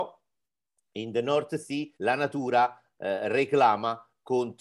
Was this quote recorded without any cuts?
no; 1 cut; at 1.9 s

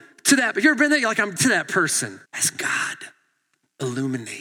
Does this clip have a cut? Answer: yes; 2 cuts; at 1.4 s, 2.2 s

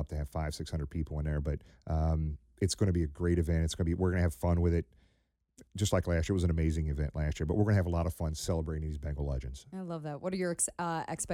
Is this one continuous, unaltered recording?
no; 2 cuts; at 1.7 s, 5.7 s

